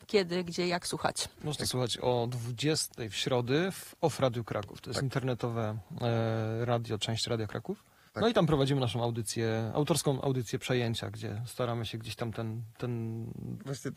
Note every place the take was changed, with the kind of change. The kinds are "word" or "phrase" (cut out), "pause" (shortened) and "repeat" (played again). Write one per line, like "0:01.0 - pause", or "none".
0:01.3 - pause
0:08.1 - pause